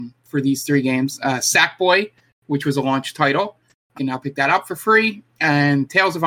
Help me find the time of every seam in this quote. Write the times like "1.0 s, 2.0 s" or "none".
3.9 s